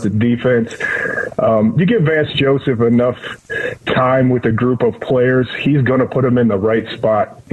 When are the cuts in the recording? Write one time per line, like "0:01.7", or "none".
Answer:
none